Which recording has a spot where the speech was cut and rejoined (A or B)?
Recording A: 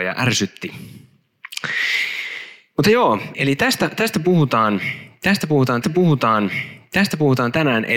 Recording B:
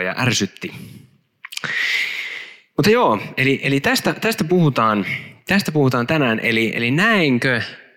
A